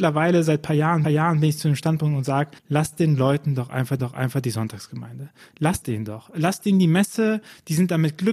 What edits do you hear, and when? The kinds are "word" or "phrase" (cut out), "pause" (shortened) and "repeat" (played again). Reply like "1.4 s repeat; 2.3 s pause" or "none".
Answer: 1.0 s repeat; 2.6 s pause; 4.0 s repeat; 5.8 s word

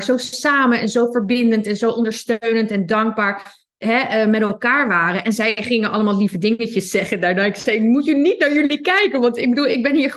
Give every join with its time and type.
none

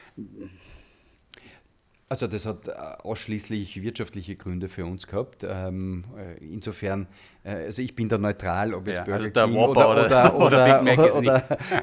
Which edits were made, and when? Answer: none

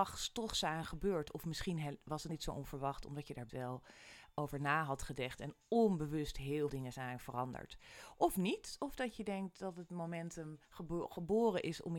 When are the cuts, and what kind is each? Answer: 2.3 s word; 3.5 s word; 6.7 s word; 10.6 s pause

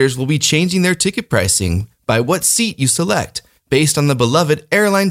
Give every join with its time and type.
none

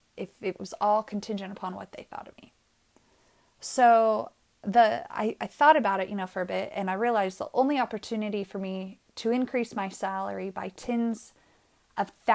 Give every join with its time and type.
4.4 s pause

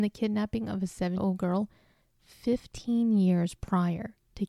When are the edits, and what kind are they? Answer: 1.2 s word

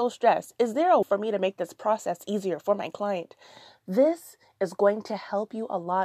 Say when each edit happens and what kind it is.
1.0 s word

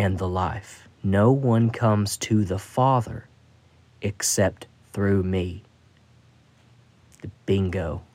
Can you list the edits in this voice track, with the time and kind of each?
1.0 s pause; 4.8 s pause

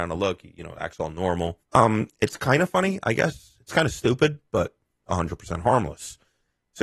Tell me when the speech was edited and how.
1.6 s pause; 5.0 s phrase

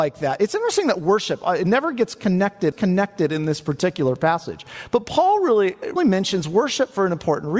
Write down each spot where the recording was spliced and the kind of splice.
2.7 s repeat; 6.0 s word

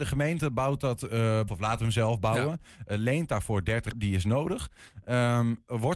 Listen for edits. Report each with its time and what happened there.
1.5 s phrase; 3.9 s word

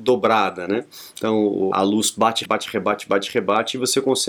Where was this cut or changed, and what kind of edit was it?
1.7 s word; 2.4 s word

